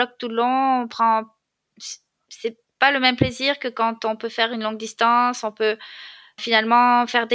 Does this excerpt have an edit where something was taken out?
yes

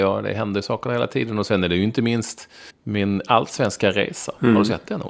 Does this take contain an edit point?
yes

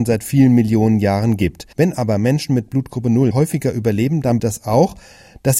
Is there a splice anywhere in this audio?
yes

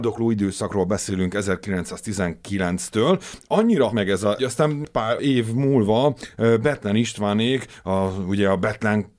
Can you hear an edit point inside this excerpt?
yes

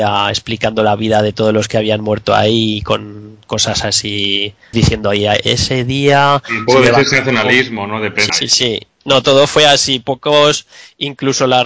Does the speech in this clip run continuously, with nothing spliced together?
no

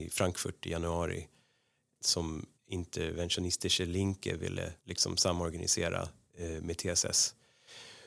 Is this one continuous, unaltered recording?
no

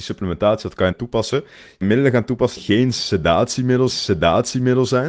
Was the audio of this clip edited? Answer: yes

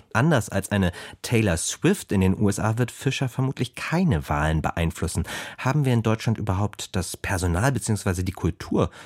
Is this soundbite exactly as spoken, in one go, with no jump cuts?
yes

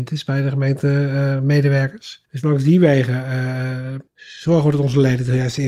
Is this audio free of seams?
no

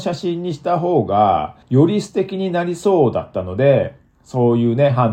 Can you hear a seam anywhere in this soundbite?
yes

